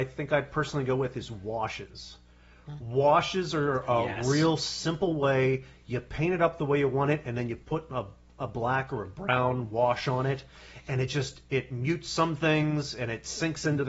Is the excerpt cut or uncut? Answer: uncut